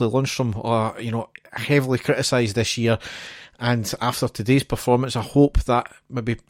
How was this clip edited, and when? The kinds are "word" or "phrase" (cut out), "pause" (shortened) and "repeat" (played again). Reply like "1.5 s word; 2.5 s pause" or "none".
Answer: none